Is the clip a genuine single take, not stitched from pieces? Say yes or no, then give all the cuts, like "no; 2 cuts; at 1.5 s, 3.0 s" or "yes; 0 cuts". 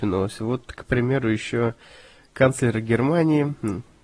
yes; 0 cuts